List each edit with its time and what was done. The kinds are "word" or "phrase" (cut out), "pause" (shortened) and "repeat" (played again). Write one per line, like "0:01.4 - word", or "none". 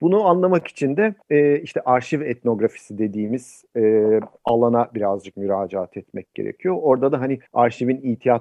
0:01.2 - pause
0:07.5 - pause